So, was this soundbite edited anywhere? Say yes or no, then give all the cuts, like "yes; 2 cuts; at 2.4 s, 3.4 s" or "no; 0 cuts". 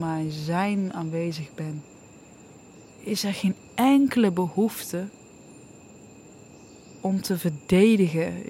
yes; 1 cut; at 2.9 s